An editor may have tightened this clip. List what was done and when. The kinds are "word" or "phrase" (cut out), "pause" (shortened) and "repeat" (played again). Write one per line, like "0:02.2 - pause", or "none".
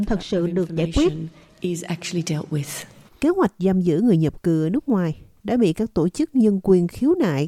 none